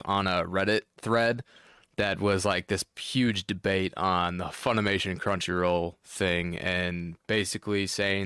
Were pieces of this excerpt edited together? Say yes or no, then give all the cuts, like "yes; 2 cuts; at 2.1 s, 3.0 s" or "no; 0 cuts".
no; 0 cuts